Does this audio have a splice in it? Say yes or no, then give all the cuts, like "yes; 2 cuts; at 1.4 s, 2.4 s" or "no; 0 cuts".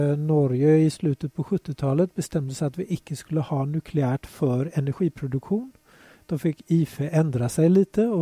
no; 0 cuts